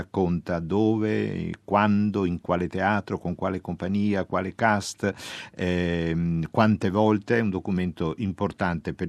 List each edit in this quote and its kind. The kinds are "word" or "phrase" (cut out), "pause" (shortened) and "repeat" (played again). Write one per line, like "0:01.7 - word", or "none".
none